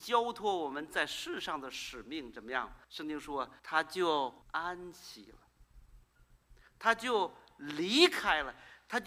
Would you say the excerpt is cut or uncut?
cut